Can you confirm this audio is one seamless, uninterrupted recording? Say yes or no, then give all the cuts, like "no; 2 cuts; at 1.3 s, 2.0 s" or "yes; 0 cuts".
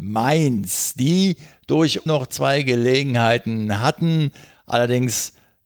no; 1 cut; at 2.1 s